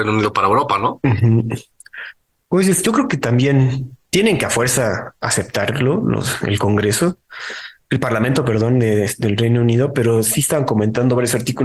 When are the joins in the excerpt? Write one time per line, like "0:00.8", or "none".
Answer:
none